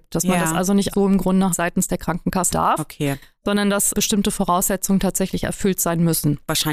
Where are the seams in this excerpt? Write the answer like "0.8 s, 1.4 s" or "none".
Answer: 0.9 s, 1.5 s, 2.5 s, 3.9 s